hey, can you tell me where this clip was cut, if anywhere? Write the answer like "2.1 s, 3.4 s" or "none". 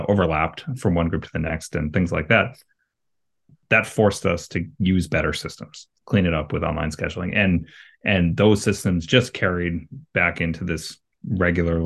none

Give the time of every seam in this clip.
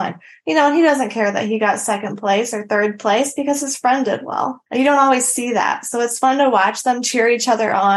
4.7 s

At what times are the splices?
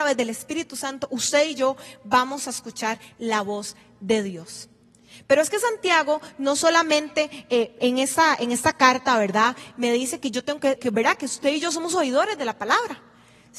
10.8 s

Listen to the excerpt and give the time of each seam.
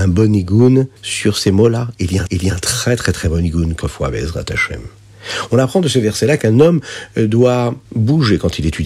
1.0 s, 2.3 s, 3.8 s, 7.9 s

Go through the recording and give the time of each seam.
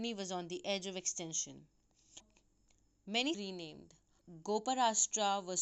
3.3 s

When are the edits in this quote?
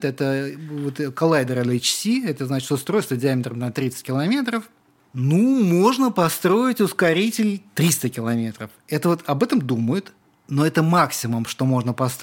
none

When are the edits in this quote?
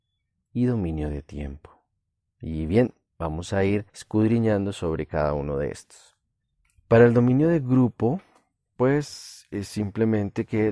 2.0 s, 3.9 s, 6.6 s

